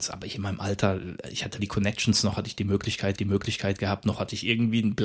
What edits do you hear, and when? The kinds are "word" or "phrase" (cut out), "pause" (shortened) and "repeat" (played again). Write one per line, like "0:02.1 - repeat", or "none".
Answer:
0:01.6 - word
0:03.2 - repeat